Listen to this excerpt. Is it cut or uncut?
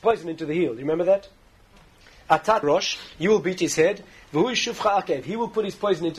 cut